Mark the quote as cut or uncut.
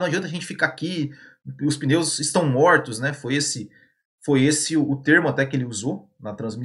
uncut